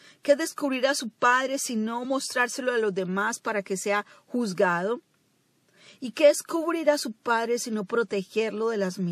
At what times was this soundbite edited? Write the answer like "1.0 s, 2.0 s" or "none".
none